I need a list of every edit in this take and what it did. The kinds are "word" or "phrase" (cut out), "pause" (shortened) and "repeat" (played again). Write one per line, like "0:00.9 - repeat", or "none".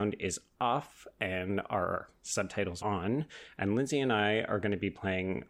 0:02.8 - word